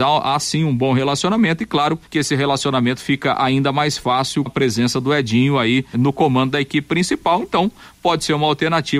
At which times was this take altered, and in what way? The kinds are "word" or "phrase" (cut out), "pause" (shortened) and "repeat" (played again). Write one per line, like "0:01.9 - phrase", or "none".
0:02.1 - pause
0:04.5 - word
0:05.9 - word

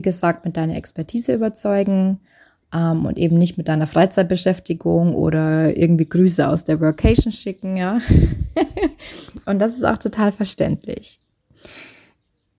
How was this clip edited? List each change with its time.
none

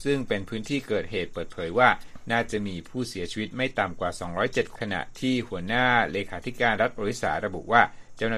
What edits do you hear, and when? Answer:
0:04.7 - phrase

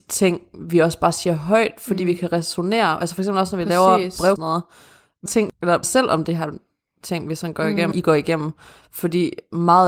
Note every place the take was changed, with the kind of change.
0:04.4 - phrase
0:05.3 - phrase
0:05.8 - word
0:07.9 - word

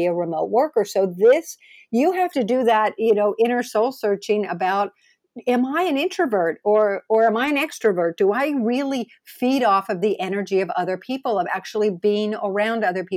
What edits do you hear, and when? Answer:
none

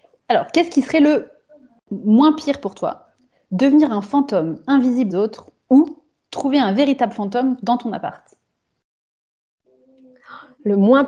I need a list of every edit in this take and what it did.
0:05.1 - phrase

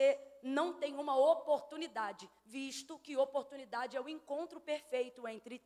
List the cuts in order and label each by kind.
0:02.4 - pause

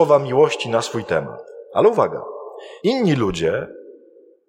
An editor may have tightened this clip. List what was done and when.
0:02.8 - pause

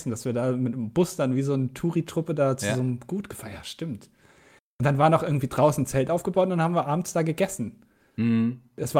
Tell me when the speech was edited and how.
none

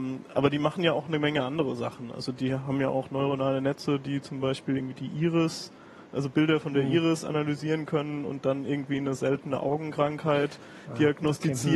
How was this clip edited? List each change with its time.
none

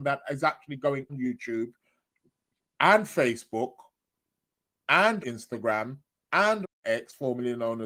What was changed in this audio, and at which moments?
0:01.1 - word
0:05.2 - word
0:06.6 - word

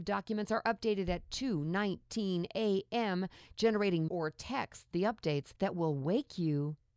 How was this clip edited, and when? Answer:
0:04.1 - word
0:04.9 - word
0:05.6 - pause

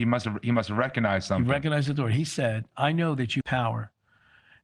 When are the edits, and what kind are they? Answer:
0:02.7 - word
0:03.4 - word

